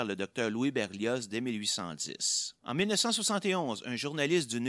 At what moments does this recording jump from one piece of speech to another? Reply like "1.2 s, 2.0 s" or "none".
2.6 s